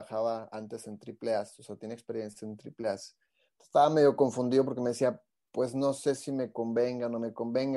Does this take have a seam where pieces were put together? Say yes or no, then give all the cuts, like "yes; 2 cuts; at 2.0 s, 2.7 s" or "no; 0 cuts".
no; 0 cuts